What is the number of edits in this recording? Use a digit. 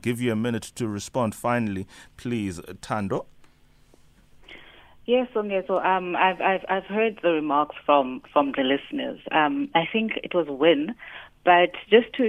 0